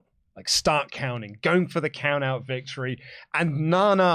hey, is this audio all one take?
yes; 0 cuts

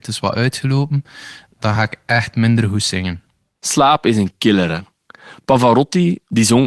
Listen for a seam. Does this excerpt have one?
no; 0 cuts

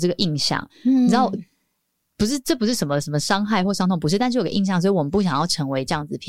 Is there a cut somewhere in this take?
no; 0 cuts

